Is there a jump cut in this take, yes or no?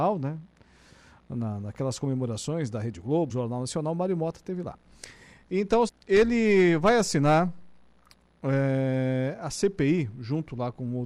yes